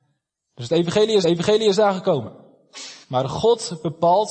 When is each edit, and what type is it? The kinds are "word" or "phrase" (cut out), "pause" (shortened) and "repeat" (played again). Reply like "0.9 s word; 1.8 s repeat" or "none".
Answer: 1.2 s repeat; 3.0 s pause